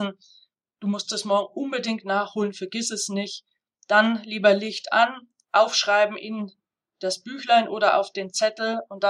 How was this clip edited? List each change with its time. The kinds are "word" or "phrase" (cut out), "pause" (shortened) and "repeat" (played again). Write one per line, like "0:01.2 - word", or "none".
none